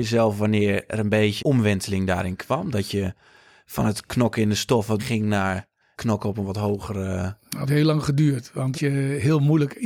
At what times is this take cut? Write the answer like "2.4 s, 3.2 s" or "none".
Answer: 1.4 s, 5.0 s, 5.9 s, 7.7 s, 8.7 s